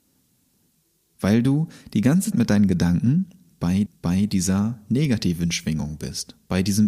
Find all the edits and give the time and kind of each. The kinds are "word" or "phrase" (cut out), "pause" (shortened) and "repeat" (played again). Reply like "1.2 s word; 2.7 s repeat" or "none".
2.3 s word; 3.9 s repeat

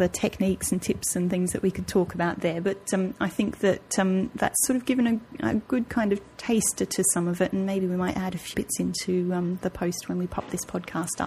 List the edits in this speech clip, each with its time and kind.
8.5 s word

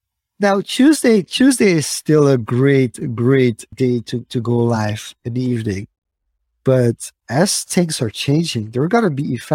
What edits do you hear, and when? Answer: none

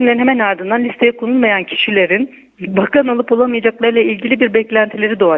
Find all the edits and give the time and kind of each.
none

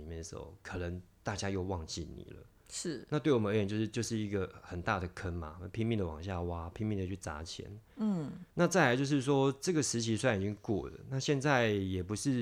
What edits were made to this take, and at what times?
8.5 s pause

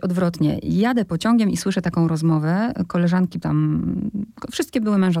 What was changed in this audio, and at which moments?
3.4 s word

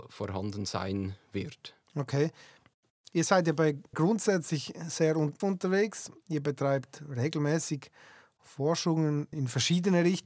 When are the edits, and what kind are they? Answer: 1.8 s pause; 3.9 s word; 5.4 s word; 9.3 s word

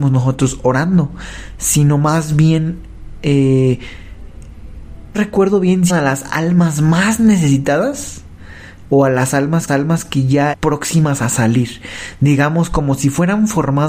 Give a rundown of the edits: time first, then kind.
5.1 s word; 5.9 s word; 9.7 s repeat; 10.5 s phrase

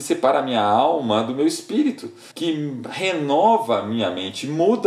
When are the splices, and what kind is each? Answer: 2.3 s pause

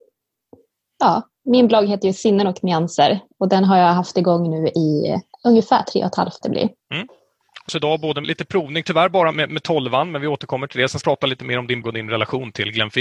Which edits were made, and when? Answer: 5.3 s pause; 6.4 s phrase; 6.8 s pause; 7.7 s phrase; 8.2 s word; 9.3 s word; 11.0 s phrase; 11.8 s word

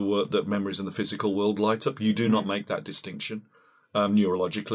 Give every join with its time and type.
none

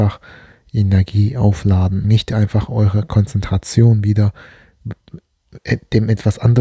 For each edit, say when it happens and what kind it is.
2.0 s word

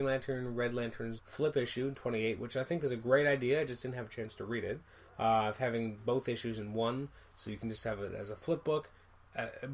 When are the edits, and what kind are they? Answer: 1.2 s word

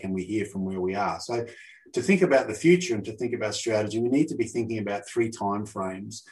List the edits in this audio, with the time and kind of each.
none

